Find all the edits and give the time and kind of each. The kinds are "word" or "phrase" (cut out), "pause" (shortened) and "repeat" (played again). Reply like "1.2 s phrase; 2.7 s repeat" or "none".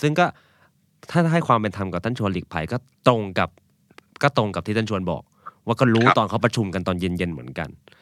none